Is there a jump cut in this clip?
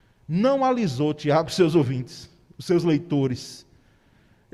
no; 0 cuts

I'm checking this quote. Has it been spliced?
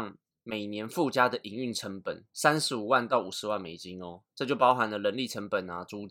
yes; 2 cuts; at 2.3 s, 4.3 s

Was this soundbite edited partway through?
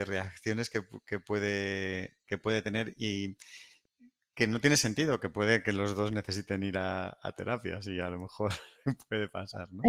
no; 0 cuts

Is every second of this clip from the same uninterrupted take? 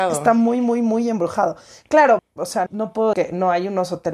no; 3 cuts; at 2.2 s, 2.7 s, 3.1 s

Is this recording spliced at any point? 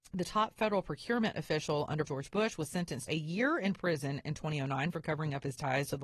yes; 2 cuts; at 2.1 s, 3.1 s

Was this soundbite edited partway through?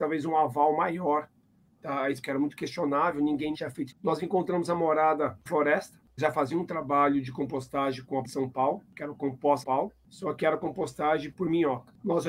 yes; 8 cuts; at 2.2 s, 3.5 s, 3.9 s, 5.5 s, 6.2 s, 8.2 s, 9.6 s, 11.3 s

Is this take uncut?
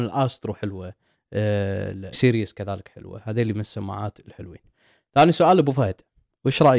no; 1 cut; at 2.1 s

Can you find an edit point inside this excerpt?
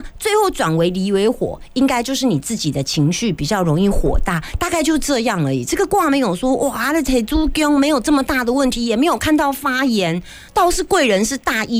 yes; 1 cut; at 10.5 s

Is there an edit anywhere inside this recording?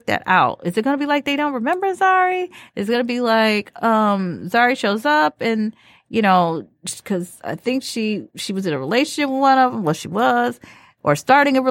no; 0 cuts

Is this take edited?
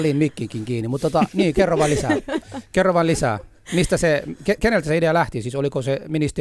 no; 0 cuts

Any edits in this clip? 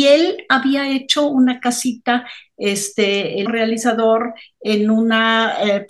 yes; 1 cut; at 3.5 s

